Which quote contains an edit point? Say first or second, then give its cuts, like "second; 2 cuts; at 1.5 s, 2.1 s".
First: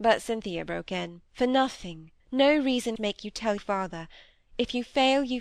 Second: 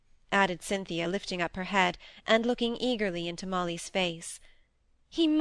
first; 4 cuts; at 1.3 s, 2.2 s, 3.0 s, 3.6 s